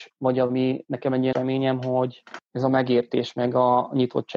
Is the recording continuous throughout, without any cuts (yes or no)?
no